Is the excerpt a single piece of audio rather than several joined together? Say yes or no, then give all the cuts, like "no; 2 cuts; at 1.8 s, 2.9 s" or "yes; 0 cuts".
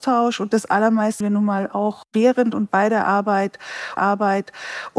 no; 2 cuts; at 1.2 s, 4.0 s